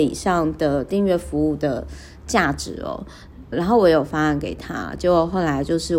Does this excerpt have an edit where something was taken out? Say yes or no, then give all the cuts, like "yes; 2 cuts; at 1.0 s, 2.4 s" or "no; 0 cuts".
yes; 1 cut; at 3.5 s